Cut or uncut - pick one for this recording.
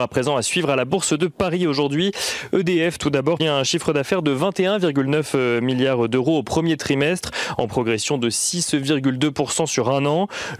cut